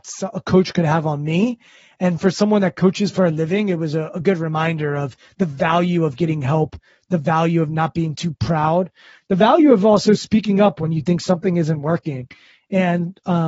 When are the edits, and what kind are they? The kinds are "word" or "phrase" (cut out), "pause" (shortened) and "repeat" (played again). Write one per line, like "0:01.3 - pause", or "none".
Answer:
none